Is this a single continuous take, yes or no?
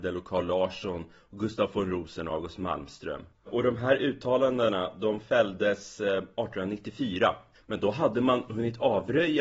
yes